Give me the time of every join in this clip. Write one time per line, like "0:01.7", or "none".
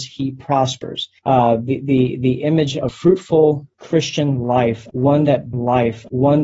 0:01.2
0:02.9
0:03.7
0:05.5